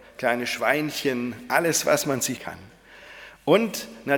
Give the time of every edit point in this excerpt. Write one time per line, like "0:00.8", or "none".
0:02.4